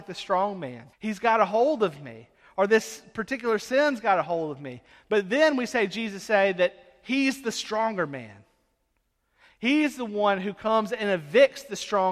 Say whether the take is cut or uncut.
cut